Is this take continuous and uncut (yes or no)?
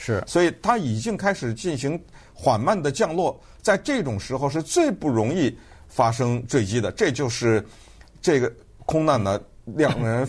yes